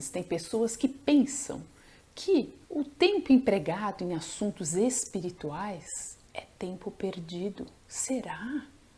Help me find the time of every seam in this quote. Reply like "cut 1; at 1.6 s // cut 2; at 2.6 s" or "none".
cut 1; at 2.6 s // cut 2; at 6.3 s // cut 3; at 7.8 s